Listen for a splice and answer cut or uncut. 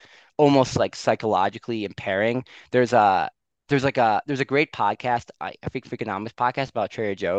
uncut